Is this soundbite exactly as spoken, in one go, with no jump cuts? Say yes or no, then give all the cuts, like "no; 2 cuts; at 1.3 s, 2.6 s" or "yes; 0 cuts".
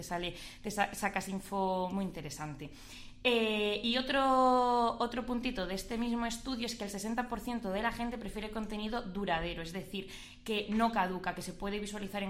no; 1 cut; at 1.9 s